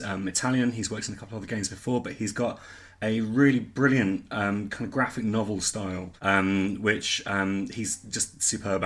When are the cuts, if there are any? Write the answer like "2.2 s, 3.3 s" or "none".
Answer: 6.2 s